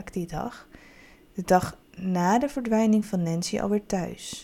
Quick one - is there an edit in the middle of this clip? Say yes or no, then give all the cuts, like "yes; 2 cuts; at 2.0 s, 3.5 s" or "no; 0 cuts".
yes; 1 cut; at 1.8 s